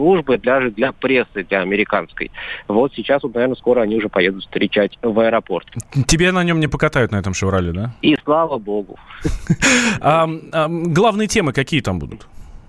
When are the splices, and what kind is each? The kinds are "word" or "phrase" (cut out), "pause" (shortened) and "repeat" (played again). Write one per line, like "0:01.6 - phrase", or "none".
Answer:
none